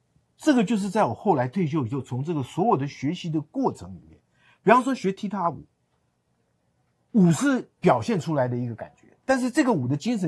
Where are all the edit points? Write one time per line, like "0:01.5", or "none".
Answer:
none